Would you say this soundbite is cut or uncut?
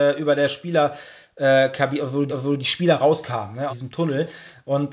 cut